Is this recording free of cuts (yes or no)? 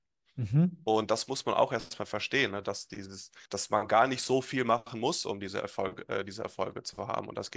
no